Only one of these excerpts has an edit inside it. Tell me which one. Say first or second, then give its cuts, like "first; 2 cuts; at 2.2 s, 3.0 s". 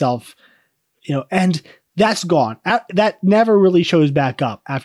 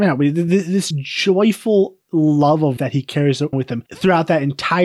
second; 5 cuts; at 0.9 s, 2.0 s, 2.8 s, 3.5 s, 3.9 s